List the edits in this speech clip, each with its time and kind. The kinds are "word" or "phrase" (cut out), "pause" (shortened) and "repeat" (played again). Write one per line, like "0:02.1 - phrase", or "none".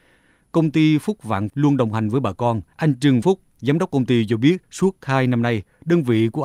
0:01.5 - word
0:02.7 - pause
0:03.2 - word
0:04.6 - pause

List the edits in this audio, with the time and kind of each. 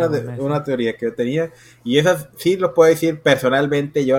none

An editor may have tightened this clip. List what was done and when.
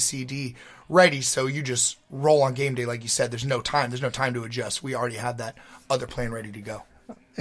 none

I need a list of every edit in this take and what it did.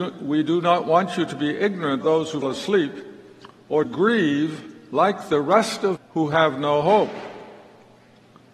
0:02.0 - word
0:02.4 - word
0:03.8 - word
0:06.0 - word

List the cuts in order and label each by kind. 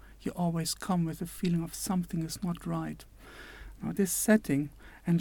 0:02.6 - word
0:04.0 - word

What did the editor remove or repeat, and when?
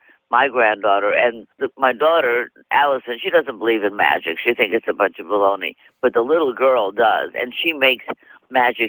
0:01.5 - pause

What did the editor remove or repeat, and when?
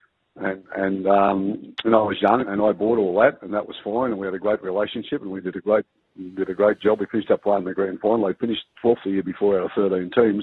0:02.4 - word

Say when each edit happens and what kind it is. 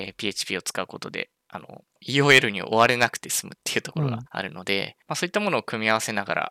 0:01.9 - pause
0:04.3 - pause
0:05.0 - pause

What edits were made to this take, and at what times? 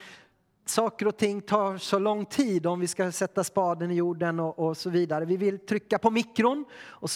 none

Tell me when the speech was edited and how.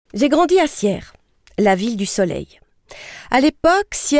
none

